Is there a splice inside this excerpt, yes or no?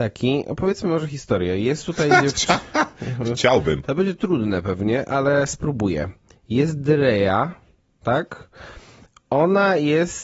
no